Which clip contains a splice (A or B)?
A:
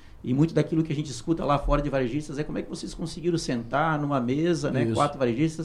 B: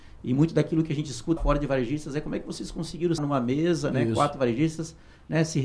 B